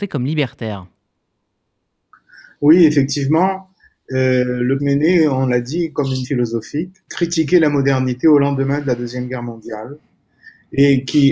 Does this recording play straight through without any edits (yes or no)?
no